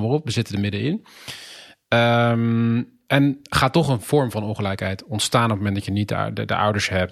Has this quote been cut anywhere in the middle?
no; 0 cuts

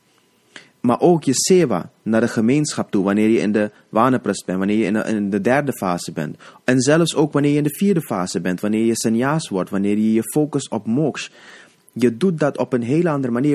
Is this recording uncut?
yes; 0 cuts

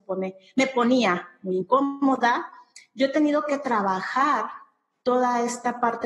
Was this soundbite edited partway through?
no; 0 cuts

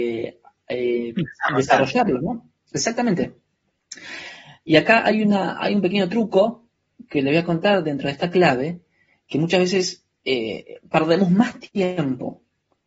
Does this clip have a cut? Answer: yes; 1 cut; at 10.2 s

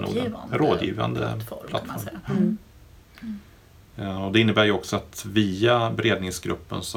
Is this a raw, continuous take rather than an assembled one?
yes; 0 cuts

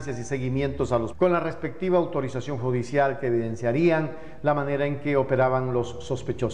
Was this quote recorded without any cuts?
no; 1 cut; at 1.1 s

